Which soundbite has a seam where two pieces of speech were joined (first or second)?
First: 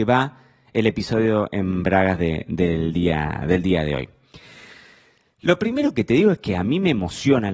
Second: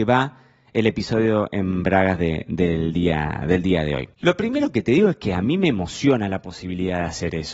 second